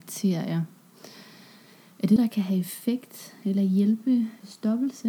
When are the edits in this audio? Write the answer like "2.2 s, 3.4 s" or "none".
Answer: 2.2 s